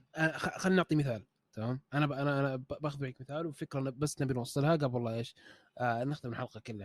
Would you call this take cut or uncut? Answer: uncut